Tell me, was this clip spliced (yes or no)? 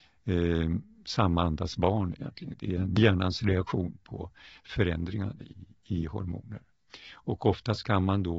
no